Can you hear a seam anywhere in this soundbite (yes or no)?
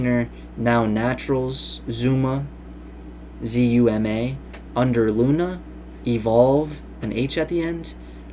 yes